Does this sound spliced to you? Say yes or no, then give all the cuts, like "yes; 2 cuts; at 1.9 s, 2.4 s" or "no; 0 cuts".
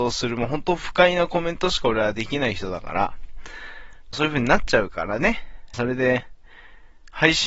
yes; 2 cuts; at 4.1 s, 5.7 s